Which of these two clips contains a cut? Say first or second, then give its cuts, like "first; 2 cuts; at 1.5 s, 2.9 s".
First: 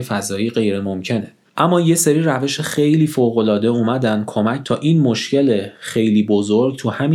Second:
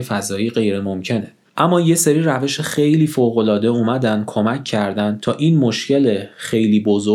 first; 1 cut; at 4.6 s